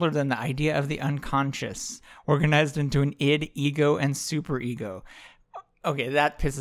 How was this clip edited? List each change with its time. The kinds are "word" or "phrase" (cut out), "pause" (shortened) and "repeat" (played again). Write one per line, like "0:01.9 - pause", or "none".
none